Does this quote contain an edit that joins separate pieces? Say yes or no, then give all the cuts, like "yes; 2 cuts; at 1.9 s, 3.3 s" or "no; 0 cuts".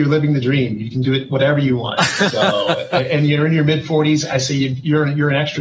no; 0 cuts